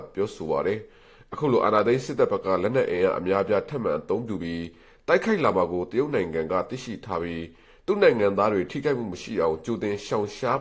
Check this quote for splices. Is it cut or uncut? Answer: uncut